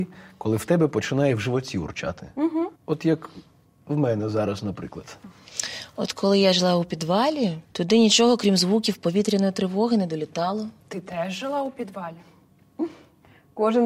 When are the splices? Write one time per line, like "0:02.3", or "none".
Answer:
0:02.8
0:07.6
0:10.8